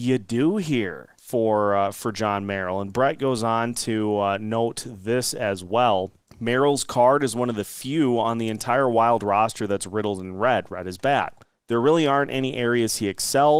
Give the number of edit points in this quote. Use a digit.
3